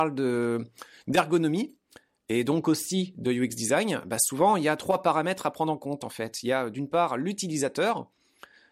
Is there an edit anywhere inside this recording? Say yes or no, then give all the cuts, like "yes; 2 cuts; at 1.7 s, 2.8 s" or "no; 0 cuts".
no; 0 cuts